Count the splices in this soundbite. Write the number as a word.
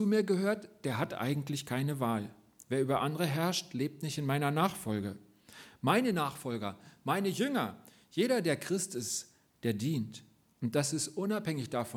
zero